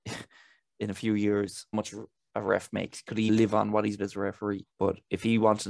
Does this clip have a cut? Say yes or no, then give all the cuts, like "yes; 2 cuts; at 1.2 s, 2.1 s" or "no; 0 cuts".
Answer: yes; 4 cuts; at 1.7 s, 3.3 s, 4.0 s, 4.7 s